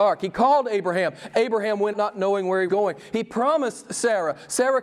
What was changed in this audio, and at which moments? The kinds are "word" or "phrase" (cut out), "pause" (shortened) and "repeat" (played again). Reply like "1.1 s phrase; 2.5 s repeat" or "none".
1.9 s word; 2.7 s word